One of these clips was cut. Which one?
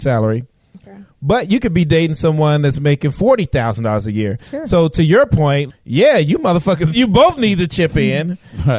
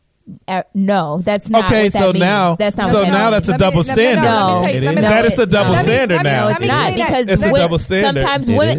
first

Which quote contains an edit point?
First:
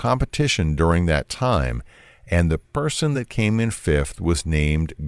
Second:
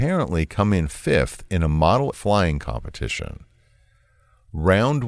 second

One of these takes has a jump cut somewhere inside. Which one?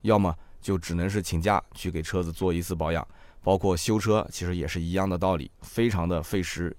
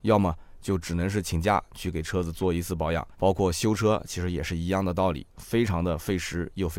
second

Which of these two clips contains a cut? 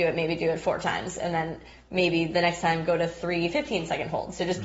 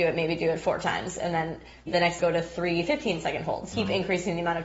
second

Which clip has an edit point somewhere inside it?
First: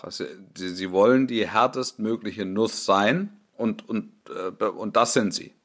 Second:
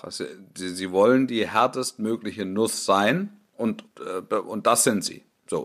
second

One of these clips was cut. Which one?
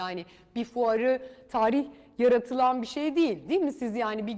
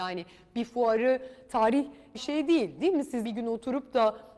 second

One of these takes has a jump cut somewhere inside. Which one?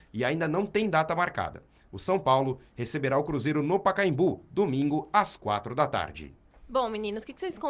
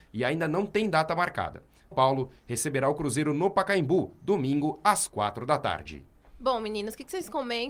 second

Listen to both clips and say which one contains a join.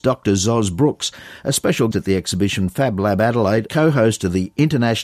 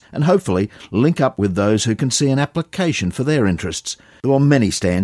first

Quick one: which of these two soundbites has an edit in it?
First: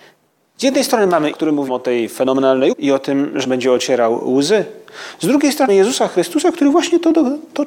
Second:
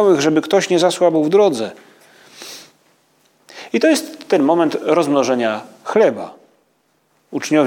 first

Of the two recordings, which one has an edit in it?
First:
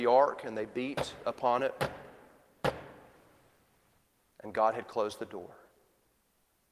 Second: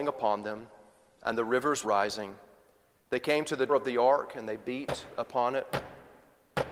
second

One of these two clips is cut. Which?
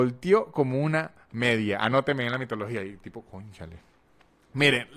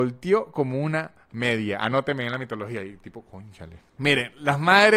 second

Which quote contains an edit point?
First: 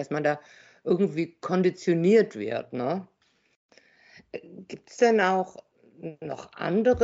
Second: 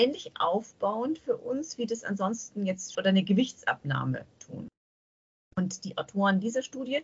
second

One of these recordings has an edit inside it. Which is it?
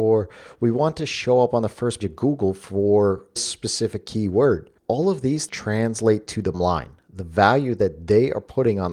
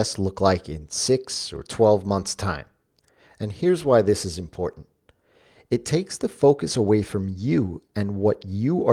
first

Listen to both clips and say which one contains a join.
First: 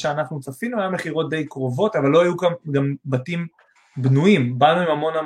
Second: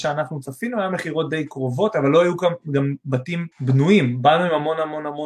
second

